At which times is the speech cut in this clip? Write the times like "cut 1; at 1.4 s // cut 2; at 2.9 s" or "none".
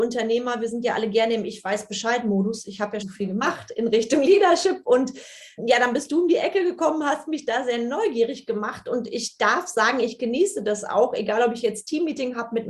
cut 1; at 3.0 s // cut 2; at 5.6 s